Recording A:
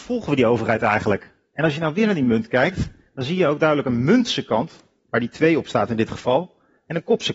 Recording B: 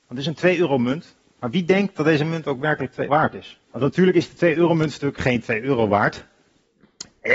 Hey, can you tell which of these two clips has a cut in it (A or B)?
B